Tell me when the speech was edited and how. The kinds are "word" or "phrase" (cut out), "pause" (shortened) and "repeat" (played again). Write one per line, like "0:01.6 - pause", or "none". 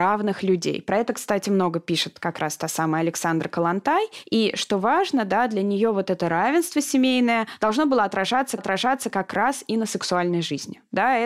0:08.6 - repeat

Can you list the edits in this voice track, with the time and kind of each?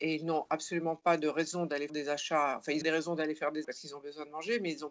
0:01.9 - word
0:02.8 - word
0:03.6 - word

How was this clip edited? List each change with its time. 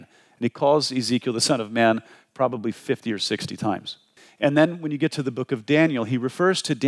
none

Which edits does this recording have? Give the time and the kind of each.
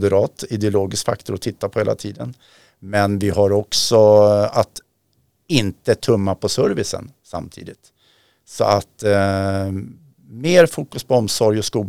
none

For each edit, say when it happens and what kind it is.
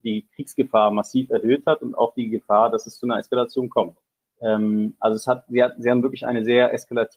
0:04.1 - pause

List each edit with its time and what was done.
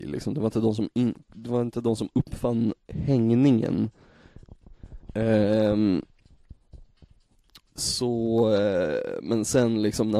none

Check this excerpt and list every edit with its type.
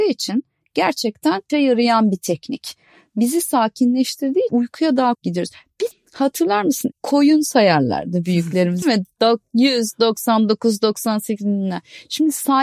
0:01.5 - word
0:04.5 - word
0:05.1 - word
0:05.9 - word
0:06.9 - word
0:08.8 - word

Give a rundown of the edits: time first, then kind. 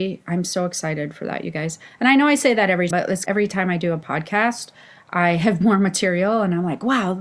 0:02.9 - word
0:03.3 - word
0:05.6 - word

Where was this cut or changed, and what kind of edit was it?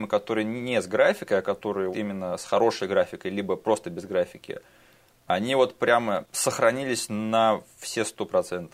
0:01.9 - word

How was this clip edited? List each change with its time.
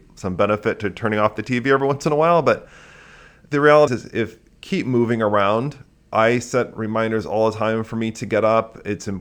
0:03.9 - word

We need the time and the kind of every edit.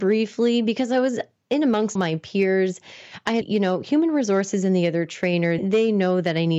0:02.0 - word
0:03.4 - word
0:05.6 - word

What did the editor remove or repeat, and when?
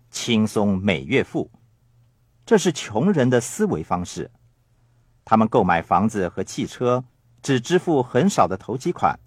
none

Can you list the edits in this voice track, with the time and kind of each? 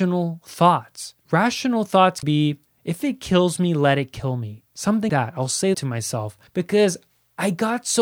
0:01.2 - pause
0:02.2 - word
0:02.7 - pause
0:05.1 - word
0:05.7 - word
0:06.5 - pause

